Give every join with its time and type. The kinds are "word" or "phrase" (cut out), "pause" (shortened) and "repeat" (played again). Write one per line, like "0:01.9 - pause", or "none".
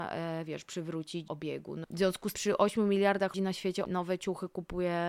0:01.3 - word
0:01.8 - word
0:02.3 - word
0:03.3 - word
0:03.8 - word